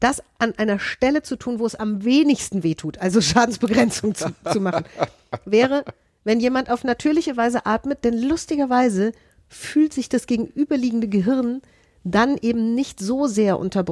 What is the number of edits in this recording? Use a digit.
0